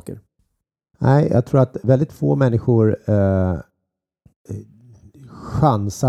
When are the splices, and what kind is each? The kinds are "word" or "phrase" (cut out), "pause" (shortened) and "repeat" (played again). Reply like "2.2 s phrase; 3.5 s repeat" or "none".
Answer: none